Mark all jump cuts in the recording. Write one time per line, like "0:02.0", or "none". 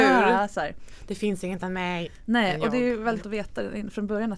0:01.6
0:03.2